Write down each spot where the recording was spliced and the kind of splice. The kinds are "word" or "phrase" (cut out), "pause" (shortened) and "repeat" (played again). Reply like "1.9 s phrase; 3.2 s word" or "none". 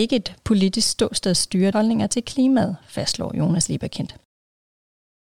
1.7 s word